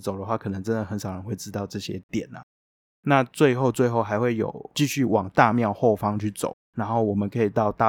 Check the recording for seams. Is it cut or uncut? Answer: cut